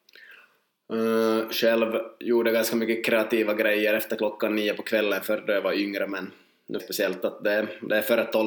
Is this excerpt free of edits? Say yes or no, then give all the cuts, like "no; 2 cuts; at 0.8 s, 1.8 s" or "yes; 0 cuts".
no; 1 cut; at 6.8 s